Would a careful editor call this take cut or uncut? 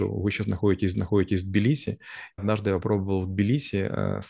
cut